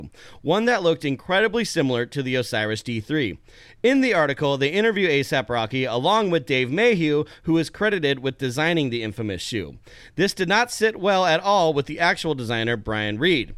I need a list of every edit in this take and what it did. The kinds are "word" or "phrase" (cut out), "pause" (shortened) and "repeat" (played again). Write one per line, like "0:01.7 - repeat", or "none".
none